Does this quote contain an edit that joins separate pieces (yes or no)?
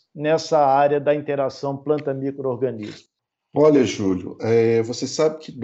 no